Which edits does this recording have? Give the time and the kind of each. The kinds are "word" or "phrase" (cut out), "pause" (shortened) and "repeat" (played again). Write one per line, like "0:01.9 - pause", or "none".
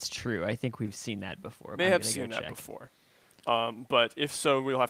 0:01.8 - word